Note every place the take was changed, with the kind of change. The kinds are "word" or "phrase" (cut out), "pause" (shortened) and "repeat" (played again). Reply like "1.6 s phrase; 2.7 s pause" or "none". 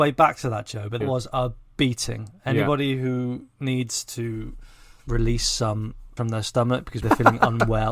1.0 s word; 5.1 s word; 6.2 s word; 7.0 s word